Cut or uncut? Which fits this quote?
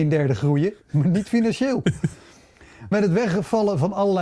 cut